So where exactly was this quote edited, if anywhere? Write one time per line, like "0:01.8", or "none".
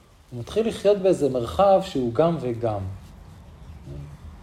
none